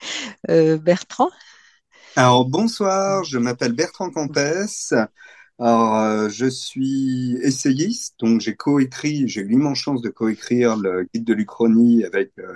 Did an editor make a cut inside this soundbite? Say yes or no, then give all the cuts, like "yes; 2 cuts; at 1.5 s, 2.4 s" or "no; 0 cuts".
no; 0 cuts